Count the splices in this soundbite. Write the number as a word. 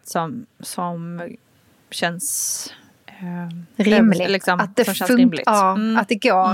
zero